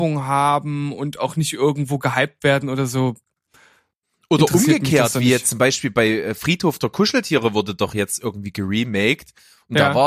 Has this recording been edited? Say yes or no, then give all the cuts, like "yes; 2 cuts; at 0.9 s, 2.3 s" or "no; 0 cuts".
no; 0 cuts